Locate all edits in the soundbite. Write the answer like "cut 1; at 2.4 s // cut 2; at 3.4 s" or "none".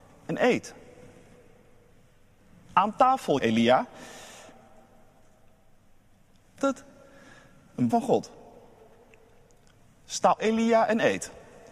cut 1; at 3.4 s // cut 2; at 6.6 s // cut 3; at 7.9 s // cut 4; at 10.4 s